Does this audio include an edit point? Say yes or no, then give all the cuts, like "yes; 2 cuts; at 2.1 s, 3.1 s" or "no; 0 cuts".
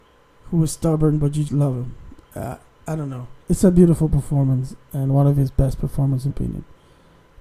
yes; 3 cuts; at 1.5 s, 3.4 s, 6.3 s